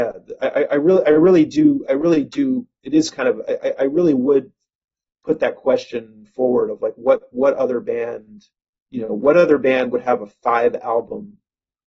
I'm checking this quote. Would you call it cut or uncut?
uncut